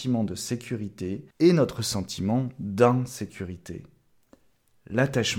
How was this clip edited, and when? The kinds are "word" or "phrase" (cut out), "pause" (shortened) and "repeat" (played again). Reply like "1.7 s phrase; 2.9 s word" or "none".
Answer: 1.3 s pause